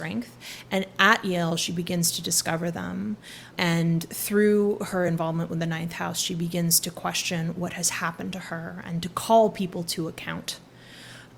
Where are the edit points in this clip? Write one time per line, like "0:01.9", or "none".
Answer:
none